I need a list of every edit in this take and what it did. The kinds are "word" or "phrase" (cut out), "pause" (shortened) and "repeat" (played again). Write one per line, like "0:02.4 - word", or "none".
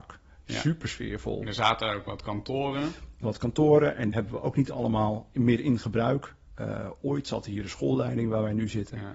0:03.2 - word
0:04.1 - word